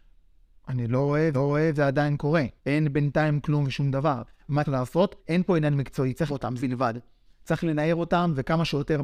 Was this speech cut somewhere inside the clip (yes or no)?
yes